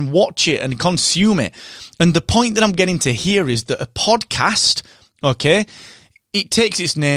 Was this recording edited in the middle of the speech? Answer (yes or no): no